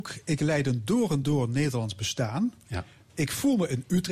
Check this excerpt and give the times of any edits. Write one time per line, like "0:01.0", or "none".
none